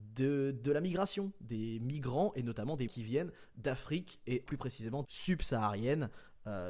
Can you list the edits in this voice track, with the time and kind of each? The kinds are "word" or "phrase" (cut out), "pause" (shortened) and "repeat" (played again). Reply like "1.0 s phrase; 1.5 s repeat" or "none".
2.9 s word; 4.5 s word; 5.1 s word